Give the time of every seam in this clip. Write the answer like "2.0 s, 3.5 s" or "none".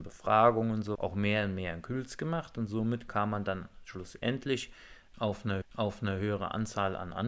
0.9 s, 5.6 s